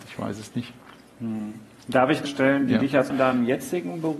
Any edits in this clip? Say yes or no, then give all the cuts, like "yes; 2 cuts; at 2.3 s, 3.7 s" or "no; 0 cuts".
yes; 2 cuts; at 2.3 s, 3.1 s